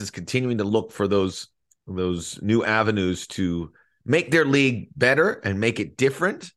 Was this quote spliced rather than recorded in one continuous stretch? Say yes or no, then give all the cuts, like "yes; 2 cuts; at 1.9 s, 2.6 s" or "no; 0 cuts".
no; 0 cuts